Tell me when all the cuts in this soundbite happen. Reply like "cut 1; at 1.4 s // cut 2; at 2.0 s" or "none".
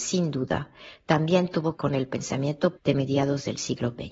cut 1; at 1.8 s // cut 2; at 2.8 s